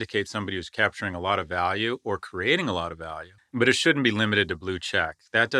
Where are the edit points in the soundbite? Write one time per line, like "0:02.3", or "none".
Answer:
0:03.4